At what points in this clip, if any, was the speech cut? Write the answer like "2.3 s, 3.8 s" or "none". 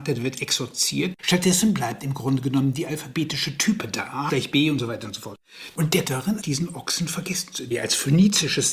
1.2 s, 4.3 s, 6.0 s, 6.4 s, 7.7 s